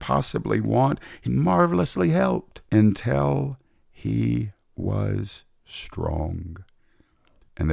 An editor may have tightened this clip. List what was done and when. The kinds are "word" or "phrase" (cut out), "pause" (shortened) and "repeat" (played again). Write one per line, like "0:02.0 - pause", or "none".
0:01.2 - word
0:02.7 - pause